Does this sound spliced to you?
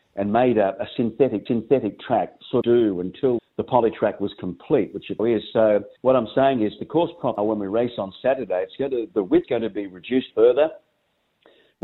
yes; 9 cuts; at 1.5 s, 2.6 s, 3.4 s, 5.2 s, 6.0 s, 7.4 s, 9.1 s, 9.4 s, 10.3 s

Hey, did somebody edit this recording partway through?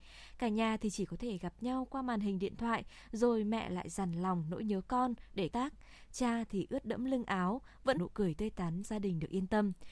yes; 3 cuts; at 5.5 s, 8.0 s, 8.8 s

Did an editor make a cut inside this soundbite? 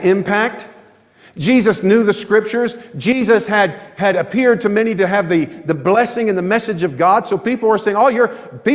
no; 0 cuts

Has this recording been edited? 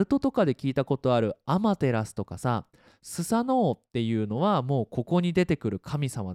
no; 0 cuts

